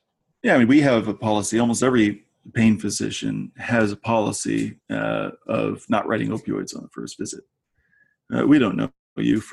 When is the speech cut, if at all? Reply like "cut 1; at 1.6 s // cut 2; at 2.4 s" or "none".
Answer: cut 1; at 4.8 s

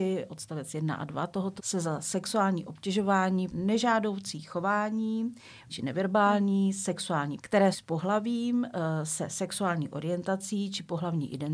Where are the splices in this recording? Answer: cut 1; at 1.6 s // cut 2; at 3.5 s // cut 3; at 5.7 s // cut 4; at 7.4 s // cut 5; at 7.7 s

